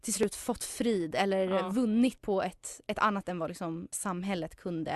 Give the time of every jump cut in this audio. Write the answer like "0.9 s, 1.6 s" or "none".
2.2 s, 3.2 s, 3.9 s